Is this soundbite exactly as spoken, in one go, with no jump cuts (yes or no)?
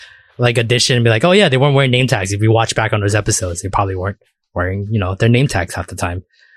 yes